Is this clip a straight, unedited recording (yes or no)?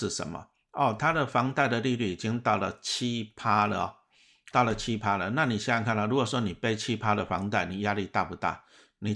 no